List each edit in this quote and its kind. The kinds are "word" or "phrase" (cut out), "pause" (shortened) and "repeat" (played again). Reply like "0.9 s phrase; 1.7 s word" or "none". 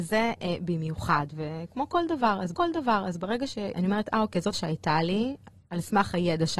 2.5 s repeat; 4.5 s word